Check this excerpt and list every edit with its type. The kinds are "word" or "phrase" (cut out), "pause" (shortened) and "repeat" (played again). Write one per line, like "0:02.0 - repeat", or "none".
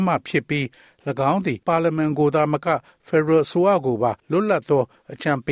0:01.6 - pause
0:04.2 - pause